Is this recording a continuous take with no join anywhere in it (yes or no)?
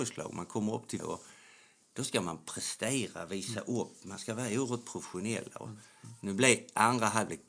no